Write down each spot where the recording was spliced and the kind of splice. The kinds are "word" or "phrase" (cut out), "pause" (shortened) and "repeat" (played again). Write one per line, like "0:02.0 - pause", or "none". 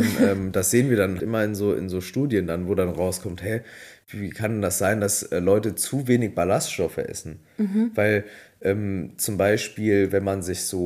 0:01.2 - word